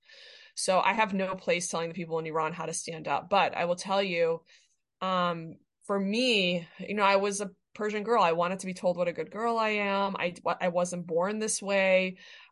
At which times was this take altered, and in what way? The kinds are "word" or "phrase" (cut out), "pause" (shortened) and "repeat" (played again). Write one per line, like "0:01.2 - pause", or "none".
none